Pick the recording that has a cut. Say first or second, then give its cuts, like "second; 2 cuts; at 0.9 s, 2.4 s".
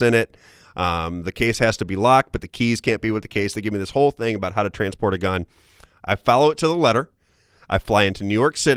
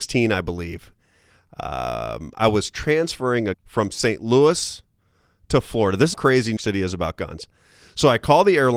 second; 3 cuts; at 3.5 s, 6.1 s, 6.6 s